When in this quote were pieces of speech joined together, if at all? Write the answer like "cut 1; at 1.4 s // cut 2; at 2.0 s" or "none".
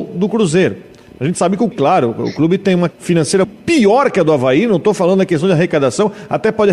cut 1; at 1.7 s // cut 2; at 2.9 s // cut 3; at 3.4 s